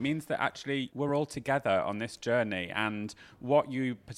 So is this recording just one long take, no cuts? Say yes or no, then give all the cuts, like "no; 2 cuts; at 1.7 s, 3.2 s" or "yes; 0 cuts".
yes; 0 cuts